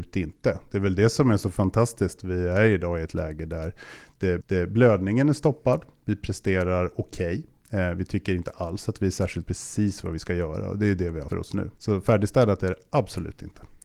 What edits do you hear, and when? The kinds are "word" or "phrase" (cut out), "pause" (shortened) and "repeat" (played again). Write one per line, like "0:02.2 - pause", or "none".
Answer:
0:02.2 - word
0:04.4 - repeat
0:09.4 - phrase
0:11.3 - word
0:11.8 - pause